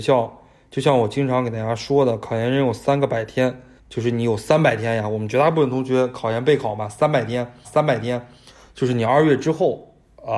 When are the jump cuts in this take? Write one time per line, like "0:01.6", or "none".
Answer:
0:03.8
0:07.6

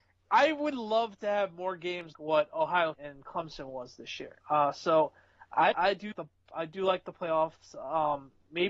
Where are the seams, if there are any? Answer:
0:02.1
0:02.9
0:04.4
0:05.7
0:06.1

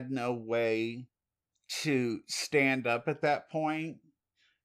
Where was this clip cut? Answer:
none

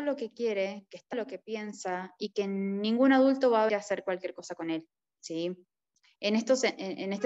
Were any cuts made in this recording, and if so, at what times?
0:01.1
0:03.7

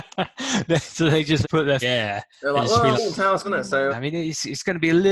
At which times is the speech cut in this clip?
0:01.4
0:01.8
0:02.9
0:03.4
0:03.9

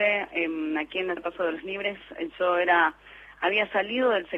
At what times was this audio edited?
0:01.2

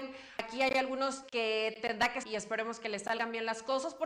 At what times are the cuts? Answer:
0:01.2
0:02.2

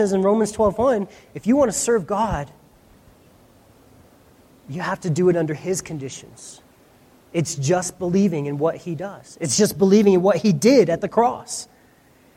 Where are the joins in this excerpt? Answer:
none

